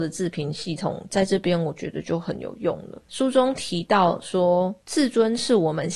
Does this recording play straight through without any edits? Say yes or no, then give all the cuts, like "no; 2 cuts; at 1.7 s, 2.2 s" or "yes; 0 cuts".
no; 1 cut; at 4.8 s